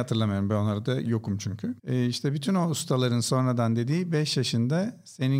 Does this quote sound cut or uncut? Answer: cut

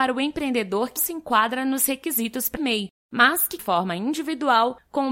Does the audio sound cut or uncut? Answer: cut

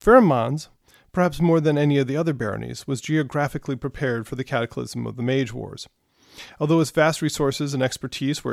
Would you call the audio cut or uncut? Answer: uncut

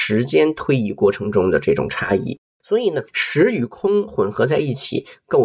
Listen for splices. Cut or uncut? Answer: cut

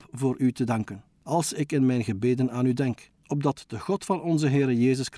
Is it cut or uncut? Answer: cut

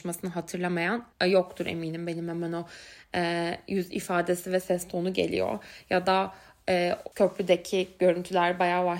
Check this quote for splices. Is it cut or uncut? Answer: cut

